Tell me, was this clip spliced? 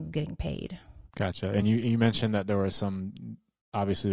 no; 0 cuts

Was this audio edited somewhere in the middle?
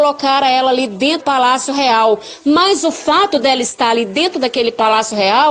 yes; 1 cut; at 1.2 s

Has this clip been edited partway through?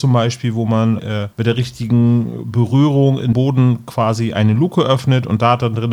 yes; 3 cuts; at 1.0 s, 1.3 s, 3.3 s

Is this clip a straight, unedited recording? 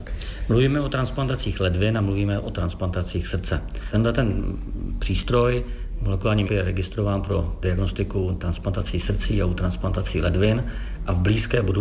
no; 1 cut; at 6.4 s

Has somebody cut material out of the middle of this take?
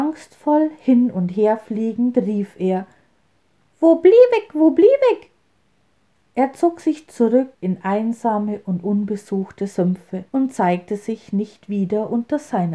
yes; 2 cuts; at 7.5 s, 10.3 s

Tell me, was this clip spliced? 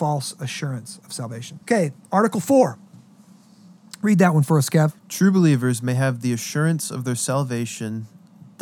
yes; 2 cuts; at 1.6 s, 5.0 s

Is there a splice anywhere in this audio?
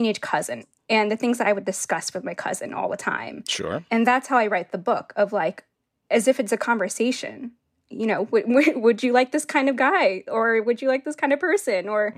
no; 0 cuts

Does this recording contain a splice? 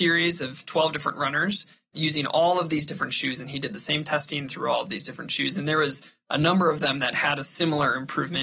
no; 0 cuts

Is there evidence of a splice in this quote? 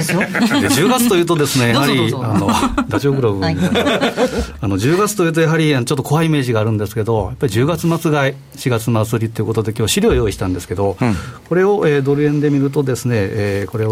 no; 0 cuts

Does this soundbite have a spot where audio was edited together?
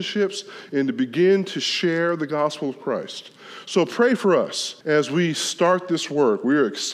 yes; 1 cut; at 4.8 s

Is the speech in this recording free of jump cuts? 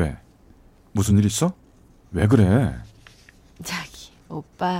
yes; 0 cuts

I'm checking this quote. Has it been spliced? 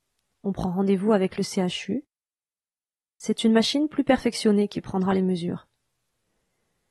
no; 0 cuts

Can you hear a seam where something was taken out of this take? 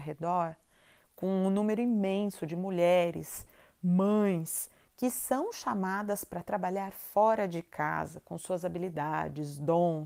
no; 0 cuts

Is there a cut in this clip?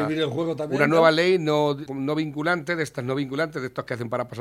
yes; 1 cut; at 1.9 s

